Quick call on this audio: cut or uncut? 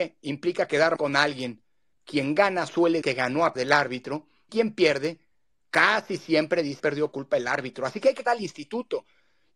cut